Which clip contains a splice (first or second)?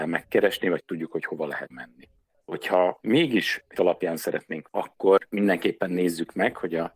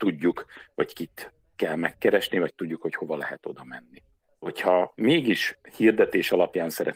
first